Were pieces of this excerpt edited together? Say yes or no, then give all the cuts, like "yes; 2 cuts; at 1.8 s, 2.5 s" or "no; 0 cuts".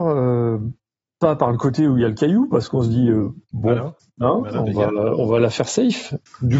no; 0 cuts